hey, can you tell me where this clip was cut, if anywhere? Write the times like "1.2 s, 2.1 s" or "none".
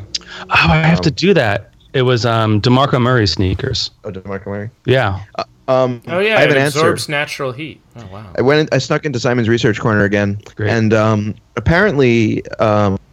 4.0 s, 4.8 s, 7.9 s, 10.5 s